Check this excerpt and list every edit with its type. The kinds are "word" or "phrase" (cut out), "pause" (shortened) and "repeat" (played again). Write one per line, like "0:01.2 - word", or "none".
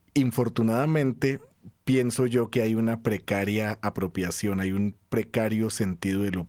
0:01.8 - pause